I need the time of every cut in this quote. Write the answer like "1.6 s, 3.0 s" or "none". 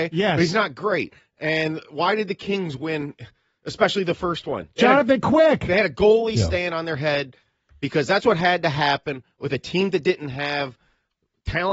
none